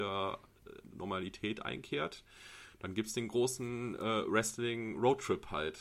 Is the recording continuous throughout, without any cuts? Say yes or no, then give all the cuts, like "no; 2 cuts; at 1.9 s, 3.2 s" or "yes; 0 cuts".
yes; 0 cuts